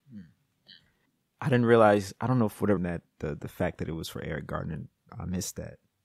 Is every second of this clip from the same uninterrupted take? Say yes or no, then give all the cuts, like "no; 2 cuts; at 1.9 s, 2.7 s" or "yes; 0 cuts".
no; 2 cuts; at 2.8 s, 5.1 s